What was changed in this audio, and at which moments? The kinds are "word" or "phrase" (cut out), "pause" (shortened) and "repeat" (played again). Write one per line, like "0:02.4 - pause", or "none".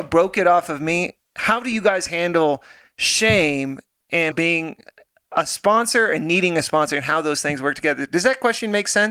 0:04.3 - word